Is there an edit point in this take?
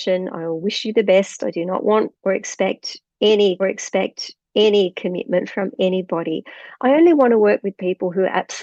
yes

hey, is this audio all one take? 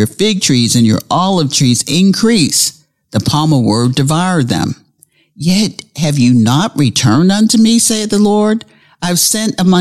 yes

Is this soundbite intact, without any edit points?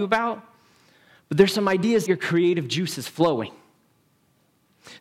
no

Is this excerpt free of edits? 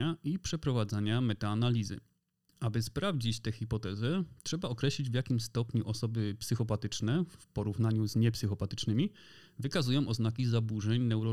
yes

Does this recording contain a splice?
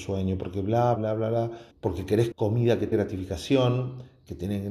yes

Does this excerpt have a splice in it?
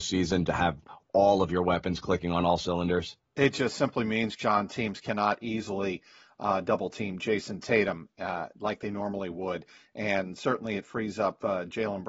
no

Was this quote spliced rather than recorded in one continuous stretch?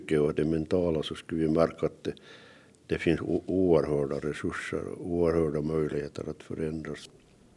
no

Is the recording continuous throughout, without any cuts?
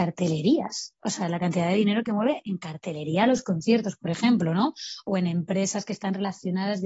yes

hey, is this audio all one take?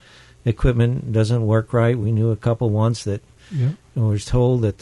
yes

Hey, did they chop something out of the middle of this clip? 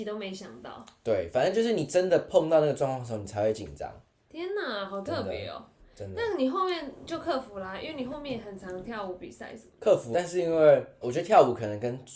yes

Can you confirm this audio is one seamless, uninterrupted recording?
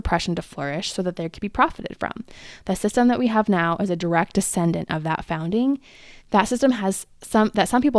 no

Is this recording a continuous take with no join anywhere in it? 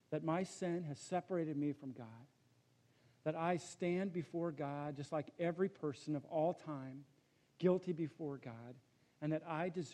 yes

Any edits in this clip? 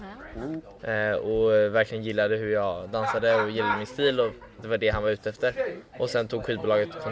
yes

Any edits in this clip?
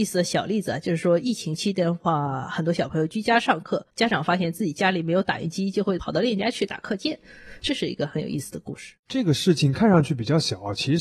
yes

